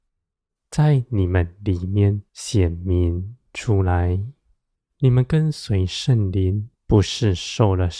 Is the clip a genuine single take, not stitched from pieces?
no; 3 cuts; at 2.3 s, 4.7 s, 6.7 s

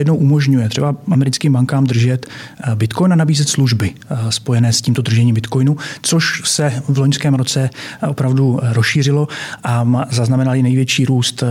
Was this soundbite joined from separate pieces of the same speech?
no; 0 cuts

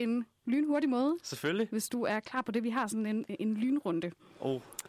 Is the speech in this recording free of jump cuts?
yes; 0 cuts

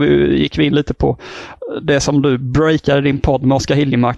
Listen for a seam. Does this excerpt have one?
no; 0 cuts

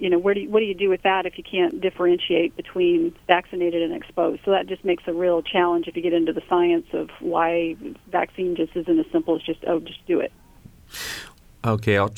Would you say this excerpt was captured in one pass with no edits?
no; 1 cut; at 3.2 s

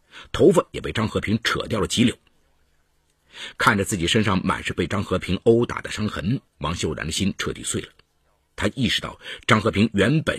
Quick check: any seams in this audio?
yes; 1 cut; at 6.5 s

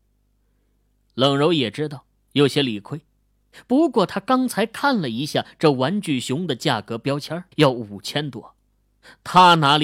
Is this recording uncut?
no; 1 cut; at 7.5 s

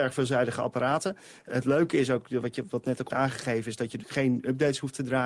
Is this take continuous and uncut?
no; 3 cuts; at 1.5 s, 3.1 s, 4.0 s

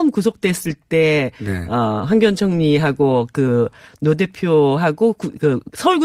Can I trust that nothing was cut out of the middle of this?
yes; 0 cuts

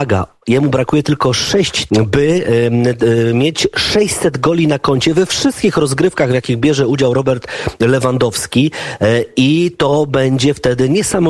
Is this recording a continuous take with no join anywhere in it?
no; 1 cut; at 1.9 s

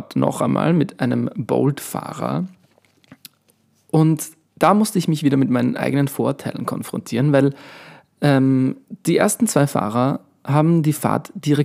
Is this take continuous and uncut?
yes; 0 cuts

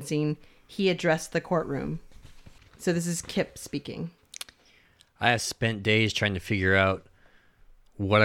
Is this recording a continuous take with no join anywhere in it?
yes; 0 cuts

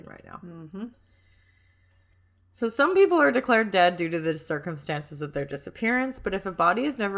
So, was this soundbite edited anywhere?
no; 0 cuts

